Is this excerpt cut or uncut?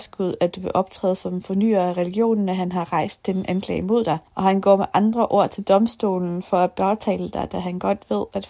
cut